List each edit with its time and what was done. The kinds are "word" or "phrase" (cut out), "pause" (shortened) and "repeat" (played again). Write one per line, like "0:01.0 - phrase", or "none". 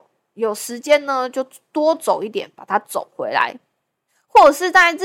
0:04.1 - pause

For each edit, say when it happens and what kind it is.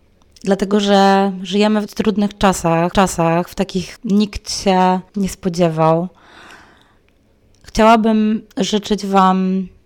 0:01.9 - word
0:02.9 - repeat
0:04.0 - word
0:05.1 - pause
0:08.5 - pause

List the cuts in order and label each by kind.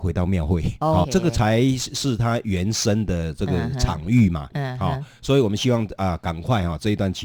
0:01.0 - phrase

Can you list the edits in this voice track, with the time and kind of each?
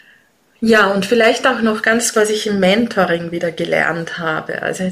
0:02.1 - word

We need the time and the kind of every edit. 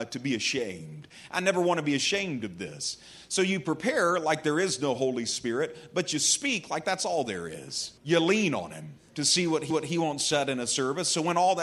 0:08.0 - pause
0:09.7 - repeat

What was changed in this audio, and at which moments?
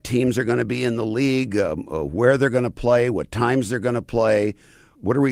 none

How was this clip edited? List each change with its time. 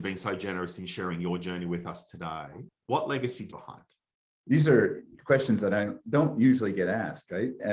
0:02.7 - pause
0:03.5 - phrase

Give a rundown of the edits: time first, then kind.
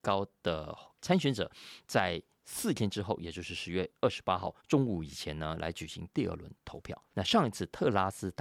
0:04.6 - pause
0:07.1 - pause

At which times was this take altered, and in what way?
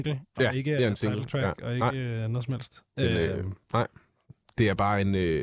none

